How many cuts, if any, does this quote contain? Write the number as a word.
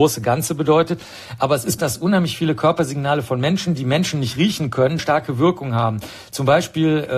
two